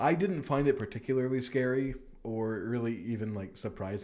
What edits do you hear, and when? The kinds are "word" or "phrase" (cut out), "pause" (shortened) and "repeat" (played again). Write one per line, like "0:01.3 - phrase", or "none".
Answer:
none